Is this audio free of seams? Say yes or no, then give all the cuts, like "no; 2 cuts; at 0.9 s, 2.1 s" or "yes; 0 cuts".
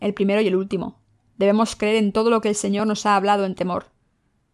yes; 0 cuts